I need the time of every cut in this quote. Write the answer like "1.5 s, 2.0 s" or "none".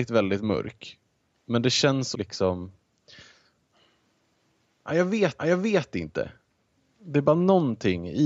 1.3 s, 2.1 s, 5.4 s